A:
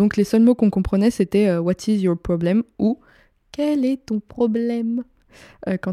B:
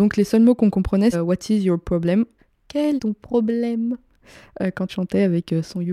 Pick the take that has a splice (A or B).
B